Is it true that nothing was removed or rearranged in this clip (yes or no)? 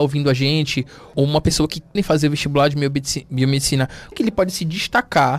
no